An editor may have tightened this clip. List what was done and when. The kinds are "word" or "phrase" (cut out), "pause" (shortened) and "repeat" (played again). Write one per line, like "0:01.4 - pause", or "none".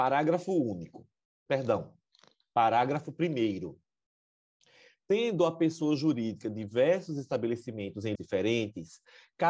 0:08.1 - word